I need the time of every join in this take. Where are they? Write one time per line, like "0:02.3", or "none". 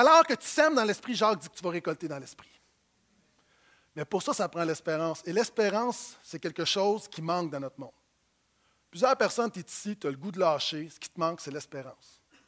none